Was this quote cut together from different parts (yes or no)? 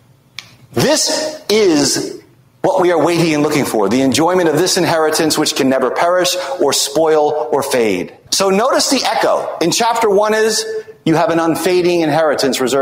yes